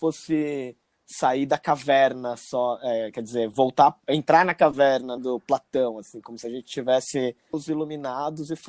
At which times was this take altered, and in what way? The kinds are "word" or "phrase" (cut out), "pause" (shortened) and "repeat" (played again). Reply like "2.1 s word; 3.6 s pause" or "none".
5.2 s word; 7.5 s word